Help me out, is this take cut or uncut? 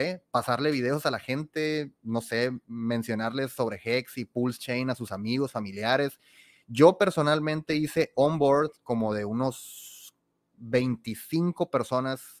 uncut